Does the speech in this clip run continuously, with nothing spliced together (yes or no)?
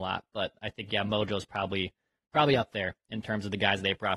yes